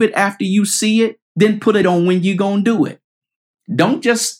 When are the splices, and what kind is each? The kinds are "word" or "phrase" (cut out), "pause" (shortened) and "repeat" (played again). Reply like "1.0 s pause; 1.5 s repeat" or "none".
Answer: 1.2 s pause; 1.8 s word